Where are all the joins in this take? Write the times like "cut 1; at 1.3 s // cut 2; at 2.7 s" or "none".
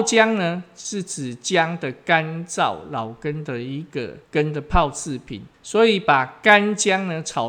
cut 1; at 4.2 s // cut 2; at 5.5 s